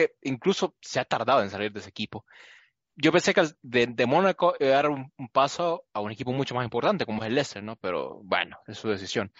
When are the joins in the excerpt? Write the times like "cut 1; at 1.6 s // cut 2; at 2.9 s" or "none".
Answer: none

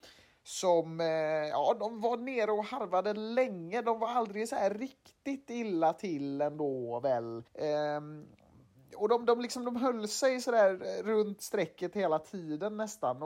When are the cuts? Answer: cut 1; at 7.5 s

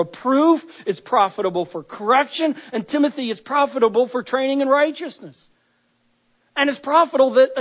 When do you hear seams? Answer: none

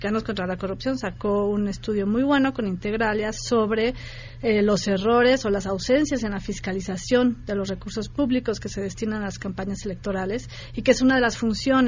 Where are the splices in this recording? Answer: none

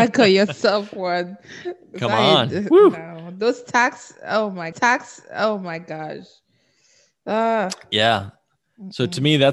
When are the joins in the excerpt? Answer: cut 1; at 4.7 s

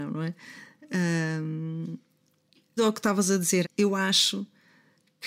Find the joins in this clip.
cut 1; at 2.8 s // cut 2; at 3.6 s

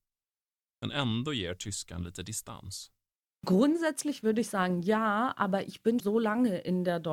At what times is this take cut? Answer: cut 1; at 6.0 s

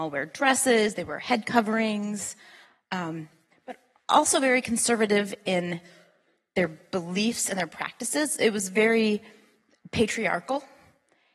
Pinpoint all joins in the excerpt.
none

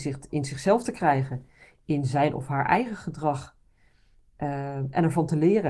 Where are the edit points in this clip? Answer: none

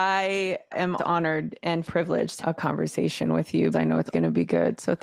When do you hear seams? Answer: cut 1; at 1.0 s // cut 2; at 1.8 s // cut 3; at 2.4 s // cut 4; at 3.7 s // cut 5; at 4.1 s

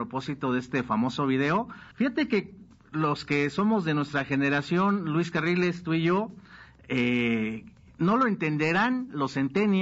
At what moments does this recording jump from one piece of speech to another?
cut 1; at 1.9 s

